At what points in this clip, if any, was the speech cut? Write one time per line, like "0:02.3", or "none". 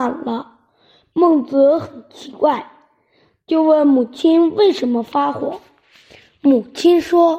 none